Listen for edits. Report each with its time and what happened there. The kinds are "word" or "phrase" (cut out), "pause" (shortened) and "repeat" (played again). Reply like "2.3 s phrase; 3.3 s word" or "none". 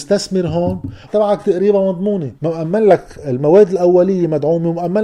1.1 s phrase; 2.4 s pause